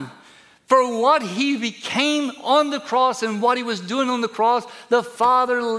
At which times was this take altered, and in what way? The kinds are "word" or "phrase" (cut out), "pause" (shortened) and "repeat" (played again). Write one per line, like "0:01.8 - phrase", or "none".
none